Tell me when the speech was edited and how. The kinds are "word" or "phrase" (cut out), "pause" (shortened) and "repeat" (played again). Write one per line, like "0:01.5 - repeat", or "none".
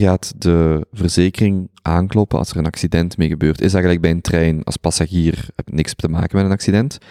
0:05.7 - word